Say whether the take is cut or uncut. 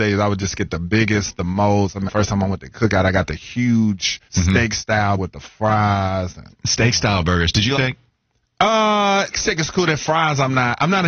cut